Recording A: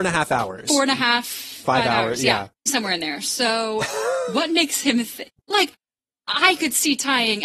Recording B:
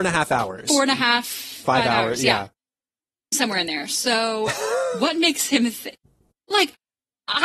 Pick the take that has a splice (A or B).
A